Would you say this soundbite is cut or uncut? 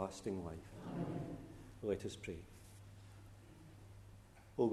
uncut